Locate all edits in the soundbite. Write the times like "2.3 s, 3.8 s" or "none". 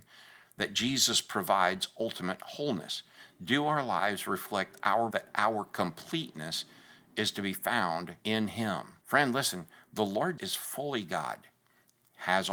5.1 s, 8.2 s, 9.0 s, 10.4 s